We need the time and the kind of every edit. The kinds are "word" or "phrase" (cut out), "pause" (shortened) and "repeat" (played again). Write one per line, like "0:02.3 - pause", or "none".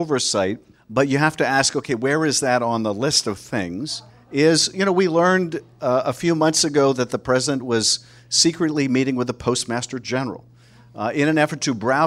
0:04.1 - pause